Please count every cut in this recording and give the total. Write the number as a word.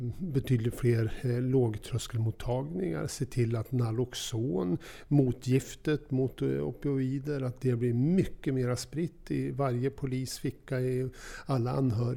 zero